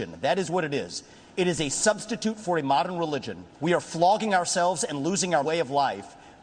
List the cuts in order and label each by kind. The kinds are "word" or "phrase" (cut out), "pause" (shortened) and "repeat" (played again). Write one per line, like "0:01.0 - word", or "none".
0:03.5 - pause
0:05.4 - word